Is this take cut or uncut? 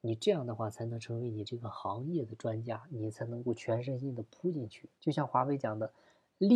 cut